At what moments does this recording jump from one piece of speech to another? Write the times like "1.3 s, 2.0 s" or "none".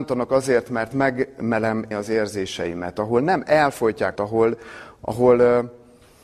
1.9 s, 4.1 s